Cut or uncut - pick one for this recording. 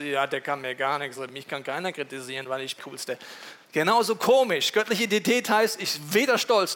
cut